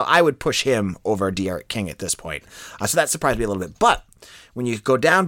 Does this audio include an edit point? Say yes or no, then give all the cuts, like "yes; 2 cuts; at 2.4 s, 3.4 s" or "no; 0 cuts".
no; 0 cuts